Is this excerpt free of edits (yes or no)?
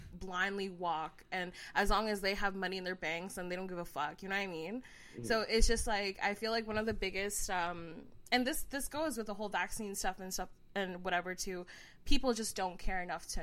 yes